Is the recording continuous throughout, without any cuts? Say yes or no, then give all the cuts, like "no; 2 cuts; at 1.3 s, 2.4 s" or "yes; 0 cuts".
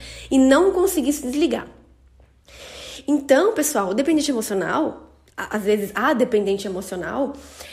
yes; 0 cuts